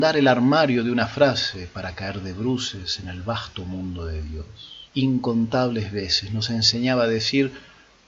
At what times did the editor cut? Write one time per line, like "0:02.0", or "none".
0:04.9